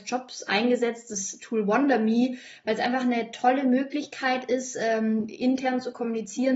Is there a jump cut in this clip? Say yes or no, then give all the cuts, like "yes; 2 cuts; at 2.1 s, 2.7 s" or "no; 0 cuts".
no; 0 cuts